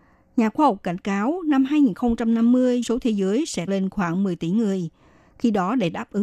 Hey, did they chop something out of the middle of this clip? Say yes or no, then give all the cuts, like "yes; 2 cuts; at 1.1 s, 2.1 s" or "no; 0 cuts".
yes; 2 cuts; at 2.8 s, 3.7 s